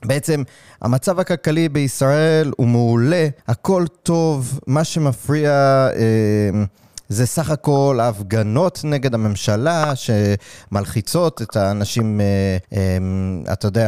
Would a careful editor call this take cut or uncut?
cut